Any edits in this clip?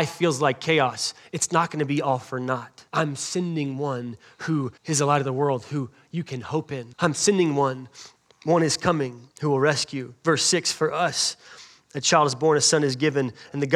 yes; 5 cuts; at 2.9 s, 4.8 s, 6.9 s, 8.2 s, 9.3 s

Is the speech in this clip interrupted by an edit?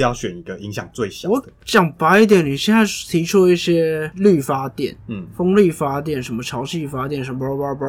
no; 0 cuts

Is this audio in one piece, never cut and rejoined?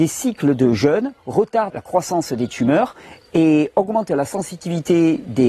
no; 1 cut; at 1.7 s

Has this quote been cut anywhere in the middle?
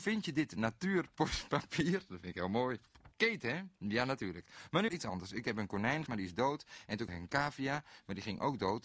yes; 4 cuts; at 3.1 s, 4.9 s, 6.1 s, 7.1 s

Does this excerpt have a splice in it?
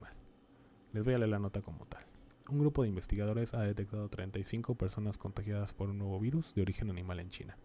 no; 0 cuts

